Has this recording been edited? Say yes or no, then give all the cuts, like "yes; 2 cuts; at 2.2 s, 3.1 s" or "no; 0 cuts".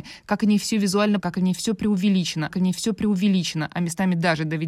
yes; 2 cuts; at 1.2 s, 2.5 s